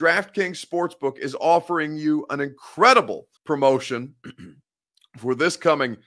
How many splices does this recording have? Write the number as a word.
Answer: one